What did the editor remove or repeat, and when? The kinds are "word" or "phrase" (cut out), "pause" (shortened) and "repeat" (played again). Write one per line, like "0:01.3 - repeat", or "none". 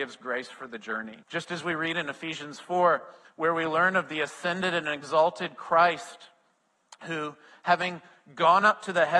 0:01.2 - pause
0:03.2 - pause